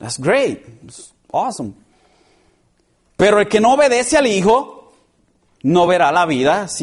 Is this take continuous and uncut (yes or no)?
yes